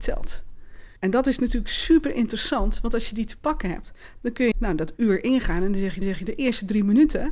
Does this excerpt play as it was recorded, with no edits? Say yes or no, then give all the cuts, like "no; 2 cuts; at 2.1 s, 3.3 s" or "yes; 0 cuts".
no; 3 cuts; at 1.0 s, 4.5 s, 6.0 s